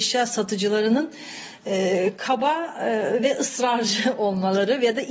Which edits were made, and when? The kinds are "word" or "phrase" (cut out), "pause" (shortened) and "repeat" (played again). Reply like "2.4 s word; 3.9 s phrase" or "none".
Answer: none